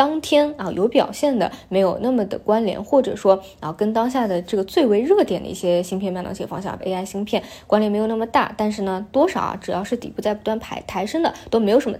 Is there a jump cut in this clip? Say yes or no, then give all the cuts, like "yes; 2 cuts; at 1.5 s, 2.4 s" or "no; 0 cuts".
yes; 1 cut; at 6.8 s